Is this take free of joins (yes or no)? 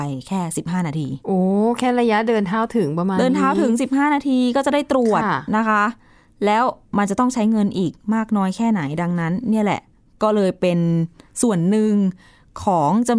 yes